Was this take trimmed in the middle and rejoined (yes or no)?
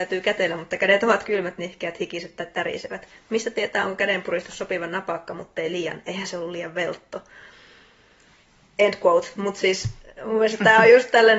no